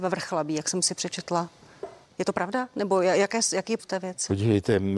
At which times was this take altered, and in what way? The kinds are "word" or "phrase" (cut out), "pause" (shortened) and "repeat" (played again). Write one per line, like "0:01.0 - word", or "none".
0:02.0 - pause
0:03.8 - word

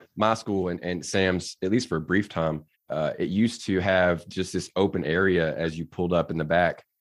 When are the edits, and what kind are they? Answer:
0:02.7 - pause

